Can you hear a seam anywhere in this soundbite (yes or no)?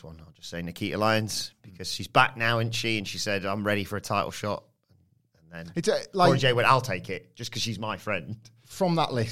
no